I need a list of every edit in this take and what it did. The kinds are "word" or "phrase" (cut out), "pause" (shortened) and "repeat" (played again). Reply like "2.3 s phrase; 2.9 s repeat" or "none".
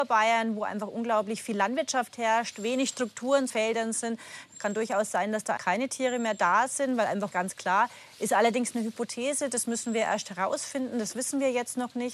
3.5 s phrase; 5.6 s word; 7.3 s phrase